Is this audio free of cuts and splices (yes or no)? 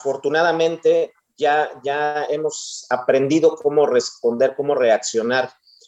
yes